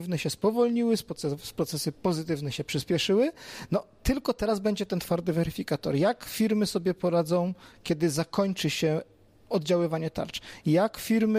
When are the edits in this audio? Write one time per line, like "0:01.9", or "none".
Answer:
none

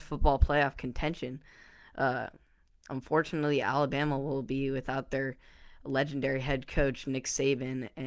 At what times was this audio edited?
none

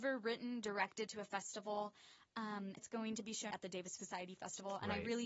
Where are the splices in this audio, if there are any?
0:01.1
0:02.8
0:03.5
0:04.0

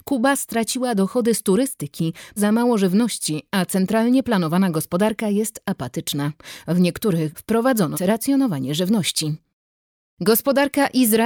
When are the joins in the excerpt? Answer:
0:02.4
0:07.3
0:07.9

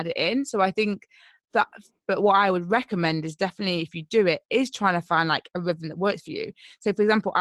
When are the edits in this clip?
none

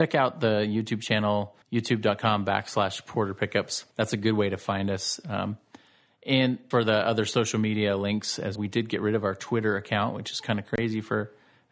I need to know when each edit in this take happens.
0:01.6
0:03.9
0:06.7
0:08.6

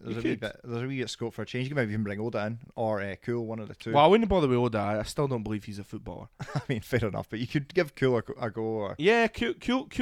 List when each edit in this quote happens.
none

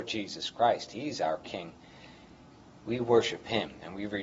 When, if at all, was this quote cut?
none

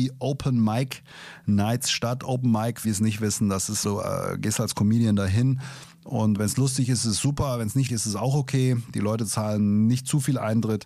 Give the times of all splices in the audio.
0:02.8
0:03.8
0:07.9

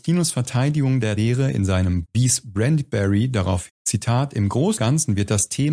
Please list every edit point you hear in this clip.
0:01.2
0:02.0
0:03.7
0:04.8

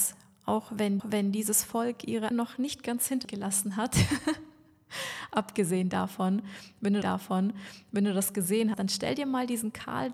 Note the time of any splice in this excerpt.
0:01.0
0:02.3
0:03.2
0:07.0
0:08.7

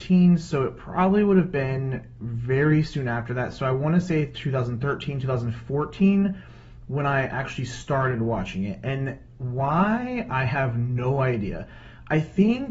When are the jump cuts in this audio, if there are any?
none

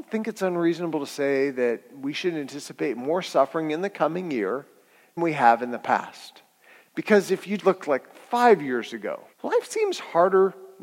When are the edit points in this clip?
0:05.2
0:07.6
0:09.3

